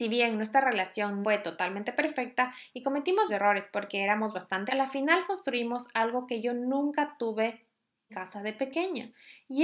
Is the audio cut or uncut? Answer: cut